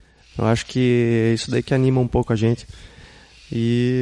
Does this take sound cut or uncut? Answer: uncut